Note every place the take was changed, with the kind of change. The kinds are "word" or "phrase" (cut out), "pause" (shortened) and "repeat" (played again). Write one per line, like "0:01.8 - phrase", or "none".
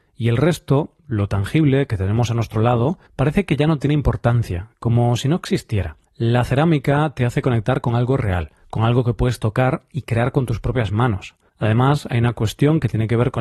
0:03.1 - pause
0:06.1 - pause
0:08.6 - pause
0:11.5 - pause